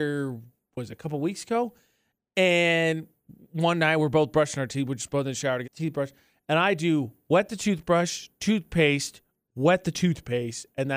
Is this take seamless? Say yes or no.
no